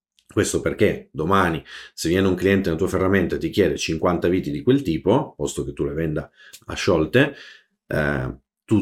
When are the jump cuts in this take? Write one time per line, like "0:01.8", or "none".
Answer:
none